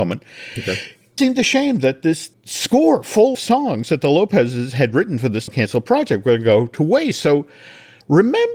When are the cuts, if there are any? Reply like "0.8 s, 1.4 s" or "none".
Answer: 1.2 s, 3.3 s, 5.5 s